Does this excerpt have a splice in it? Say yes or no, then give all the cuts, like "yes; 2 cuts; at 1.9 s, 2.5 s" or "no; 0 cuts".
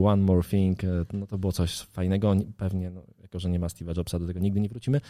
no; 0 cuts